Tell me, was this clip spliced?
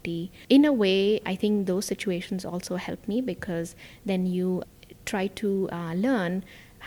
no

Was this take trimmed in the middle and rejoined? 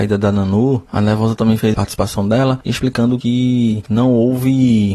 yes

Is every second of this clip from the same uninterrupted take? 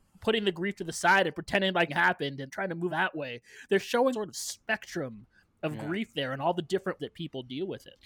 no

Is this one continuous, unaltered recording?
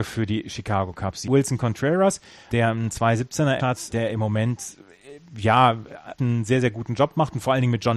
no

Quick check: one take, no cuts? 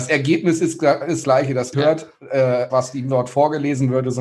no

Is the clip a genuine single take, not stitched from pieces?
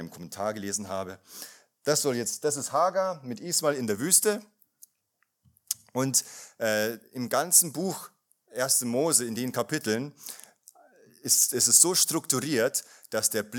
yes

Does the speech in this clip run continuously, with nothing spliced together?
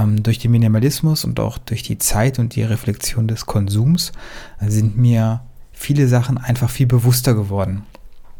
no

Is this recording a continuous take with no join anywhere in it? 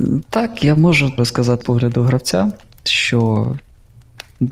no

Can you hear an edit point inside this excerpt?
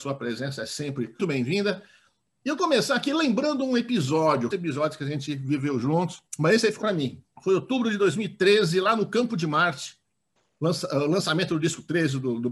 yes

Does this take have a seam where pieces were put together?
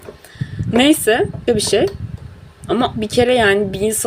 yes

